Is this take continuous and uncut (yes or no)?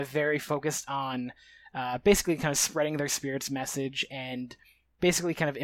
yes